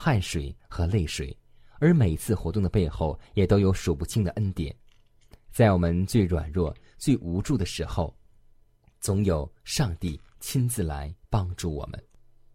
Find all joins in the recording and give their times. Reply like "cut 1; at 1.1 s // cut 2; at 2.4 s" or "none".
none

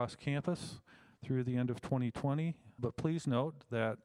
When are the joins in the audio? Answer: cut 1; at 2.8 s

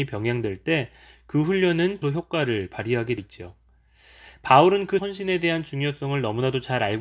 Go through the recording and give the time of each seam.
cut 1; at 2.0 s // cut 2; at 3.2 s // cut 3; at 5.0 s

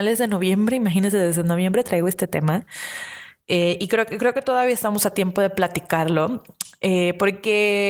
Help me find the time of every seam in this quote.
none

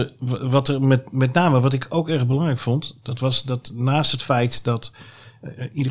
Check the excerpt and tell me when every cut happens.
none

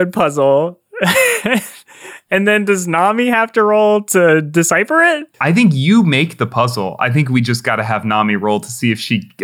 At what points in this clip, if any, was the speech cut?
cut 1; at 5.3 s

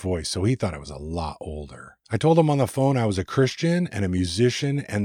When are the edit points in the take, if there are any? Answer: cut 1; at 2.0 s

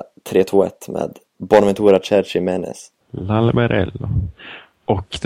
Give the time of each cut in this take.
cut 1; at 1.3 s // cut 2; at 3.0 s

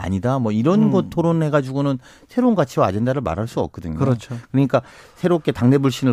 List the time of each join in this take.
none

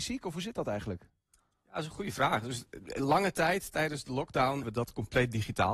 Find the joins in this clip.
cut 1; at 4.6 s

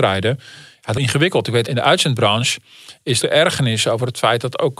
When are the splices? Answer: cut 1; at 1.0 s // cut 2; at 1.7 s // cut 3; at 3.2 s

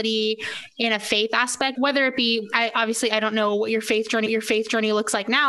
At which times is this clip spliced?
cut 1; at 1.7 s // cut 2; at 4.3 s

